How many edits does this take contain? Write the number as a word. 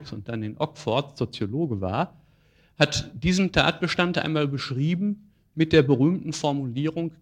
zero